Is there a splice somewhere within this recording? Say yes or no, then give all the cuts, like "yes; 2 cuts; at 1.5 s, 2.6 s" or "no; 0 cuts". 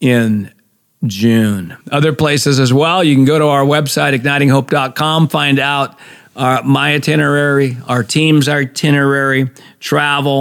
yes; 1 cut; at 1.8 s